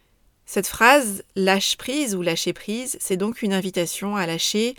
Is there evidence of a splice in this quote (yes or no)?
no